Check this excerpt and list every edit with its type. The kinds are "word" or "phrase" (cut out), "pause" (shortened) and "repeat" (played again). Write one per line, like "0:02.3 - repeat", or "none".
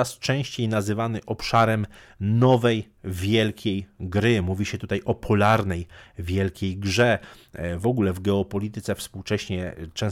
none